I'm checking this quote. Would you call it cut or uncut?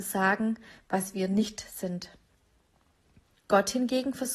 uncut